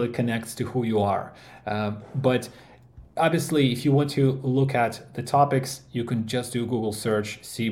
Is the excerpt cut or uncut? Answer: uncut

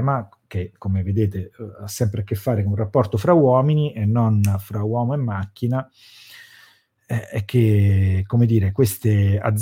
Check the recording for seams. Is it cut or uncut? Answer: uncut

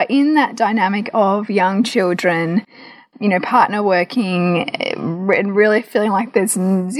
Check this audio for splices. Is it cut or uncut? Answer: uncut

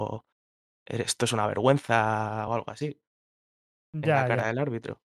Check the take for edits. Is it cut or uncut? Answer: uncut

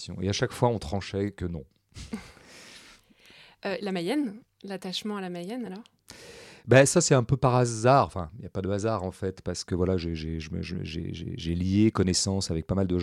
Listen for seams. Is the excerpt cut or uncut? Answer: uncut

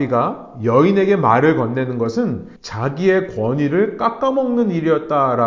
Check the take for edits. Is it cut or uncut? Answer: cut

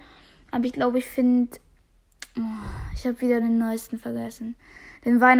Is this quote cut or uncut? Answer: uncut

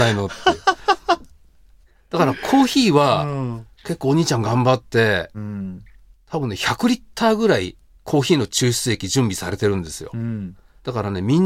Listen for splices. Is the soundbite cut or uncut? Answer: uncut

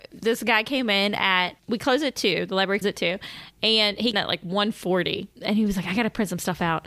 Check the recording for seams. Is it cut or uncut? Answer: cut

